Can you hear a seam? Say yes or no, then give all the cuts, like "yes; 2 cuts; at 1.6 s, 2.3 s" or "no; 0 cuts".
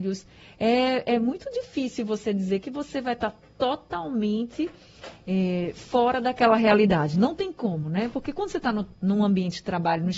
no; 0 cuts